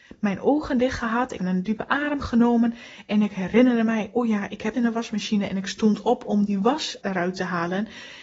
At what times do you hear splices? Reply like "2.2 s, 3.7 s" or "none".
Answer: 1.4 s, 4.7 s, 7.0 s